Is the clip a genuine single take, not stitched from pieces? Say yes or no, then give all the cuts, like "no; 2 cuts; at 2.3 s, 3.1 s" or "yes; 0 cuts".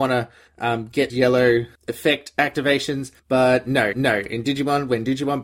no; 4 cuts; at 1.1 s, 1.8 s, 3.2 s, 3.9 s